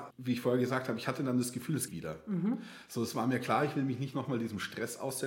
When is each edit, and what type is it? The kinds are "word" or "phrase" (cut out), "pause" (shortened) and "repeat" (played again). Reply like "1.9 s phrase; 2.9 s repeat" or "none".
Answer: 1.9 s word